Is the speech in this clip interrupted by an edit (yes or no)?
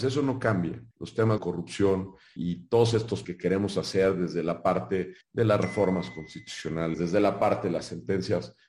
yes